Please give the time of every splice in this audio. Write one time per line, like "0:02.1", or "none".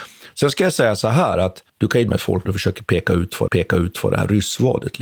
0:01.7
0:02.1
0:02.5
0:03.5

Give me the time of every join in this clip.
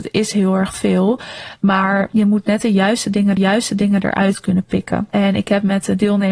0:03.4

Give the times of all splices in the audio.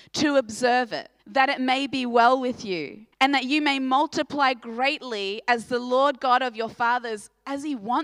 0:01.2
0:03.1

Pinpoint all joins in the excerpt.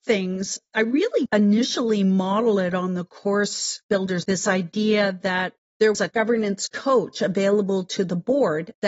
0:01.3
0:04.2
0:05.9

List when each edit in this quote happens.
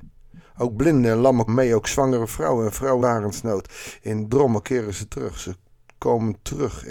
0:01.5
0:03.0
0:04.3

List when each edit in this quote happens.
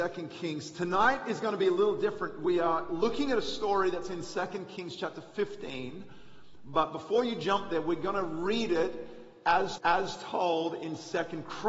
0:09.8

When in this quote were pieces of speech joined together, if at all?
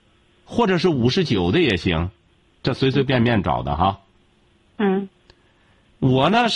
none

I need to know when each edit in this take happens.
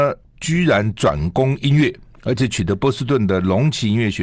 none

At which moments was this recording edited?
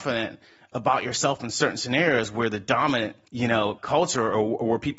0:03.2
0:03.8

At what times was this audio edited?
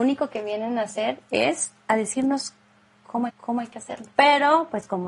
0:03.3
0:04.1

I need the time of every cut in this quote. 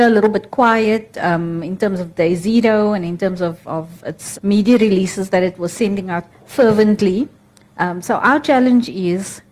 0:04.3
0:06.3

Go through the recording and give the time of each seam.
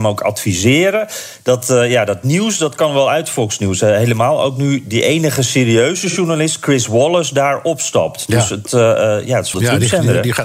0:09.5

